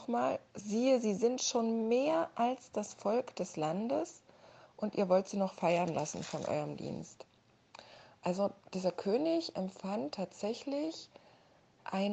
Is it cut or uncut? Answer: uncut